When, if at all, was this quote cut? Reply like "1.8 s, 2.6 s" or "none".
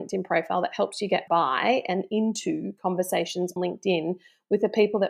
1.3 s, 3.6 s